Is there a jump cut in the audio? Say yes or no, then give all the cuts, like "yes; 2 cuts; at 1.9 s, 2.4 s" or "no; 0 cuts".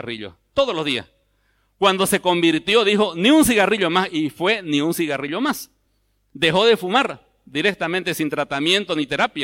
no; 0 cuts